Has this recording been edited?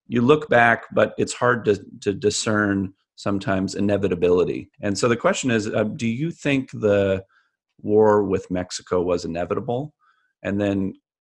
yes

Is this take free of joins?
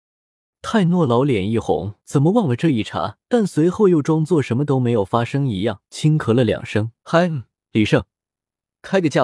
no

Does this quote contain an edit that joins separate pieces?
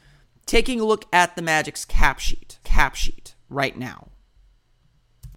yes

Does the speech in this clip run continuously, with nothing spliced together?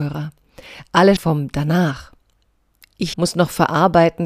no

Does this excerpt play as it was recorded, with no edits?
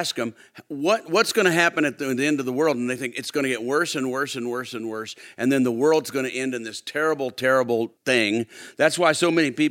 no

